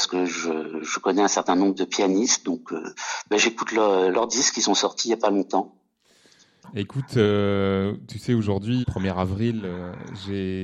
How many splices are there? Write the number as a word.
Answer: one